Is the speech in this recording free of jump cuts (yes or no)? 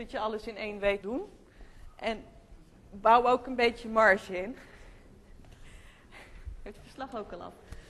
no